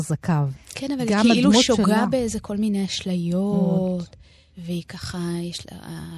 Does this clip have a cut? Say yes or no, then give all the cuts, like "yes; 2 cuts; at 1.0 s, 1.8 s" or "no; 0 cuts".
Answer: no; 0 cuts